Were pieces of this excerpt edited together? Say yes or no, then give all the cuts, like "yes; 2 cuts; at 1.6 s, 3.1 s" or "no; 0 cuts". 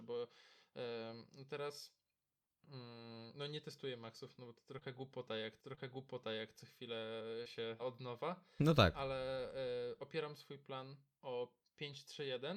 yes; 2 cuts; at 5.6 s, 7.8 s